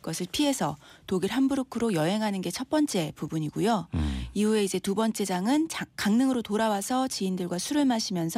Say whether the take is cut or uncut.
uncut